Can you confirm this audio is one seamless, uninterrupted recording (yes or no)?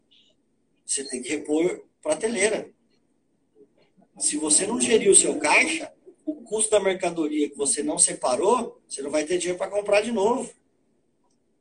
no